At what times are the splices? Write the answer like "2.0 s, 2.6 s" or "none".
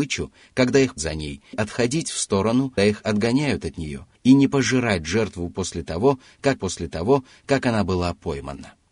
1.0 s, 1.5 s, 2.8 s, 4.1 s, 6.6 s